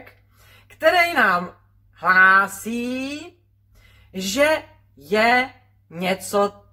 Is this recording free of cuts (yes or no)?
yes